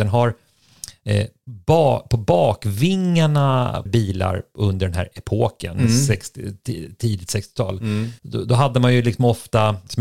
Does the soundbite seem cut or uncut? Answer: cut